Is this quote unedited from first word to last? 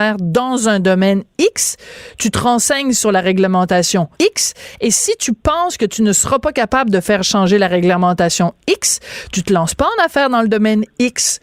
no; 1 cut; at 4.1 s

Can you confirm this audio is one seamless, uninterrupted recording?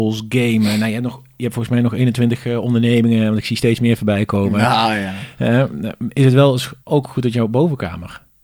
no; 1 cut; at 6.8 s

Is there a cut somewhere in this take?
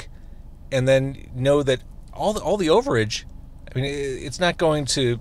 no; 0 cuts

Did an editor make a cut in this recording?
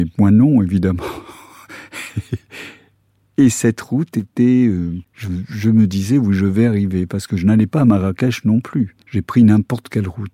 yes; 2 cuts; at 5.1 s, 9.0 s

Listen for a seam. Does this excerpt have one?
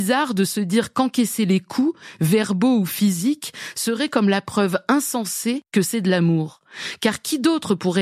no; 0 cuts

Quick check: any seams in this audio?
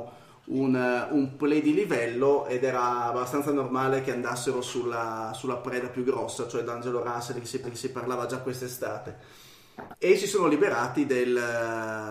yes; 1 cut; at 7.6 s

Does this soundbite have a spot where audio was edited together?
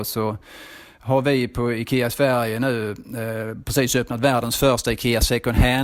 no; 0 cuts

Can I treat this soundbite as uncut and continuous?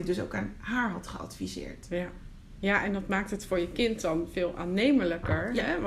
yes; 0 cuts

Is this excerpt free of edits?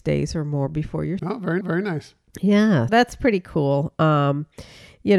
no; 3 cuts; at 1.2 s, 1.6 s, 2.9 s

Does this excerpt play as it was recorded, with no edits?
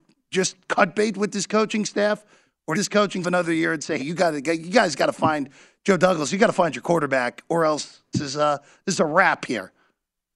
no; 4 cuts; at 2.7 s, 3.2 s, 4.0 s, 8.1 s

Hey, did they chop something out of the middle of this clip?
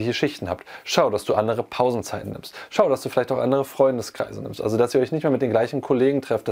no; 0 cuts

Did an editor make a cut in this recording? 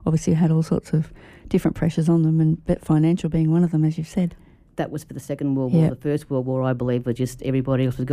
no; 0 cuts

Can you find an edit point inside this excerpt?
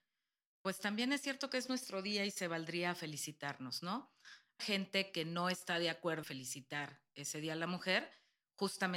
yes; 2 cuts; at 4.6 s, 6.2 s

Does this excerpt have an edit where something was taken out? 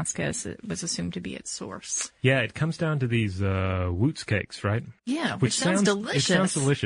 yes; 2 cuts; at 2.2 s, 5.0 s

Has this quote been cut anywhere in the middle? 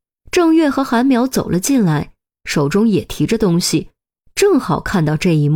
no; 0 cuts

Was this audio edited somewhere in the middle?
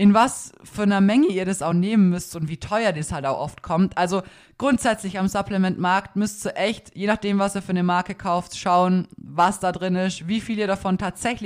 no; 0 cuts

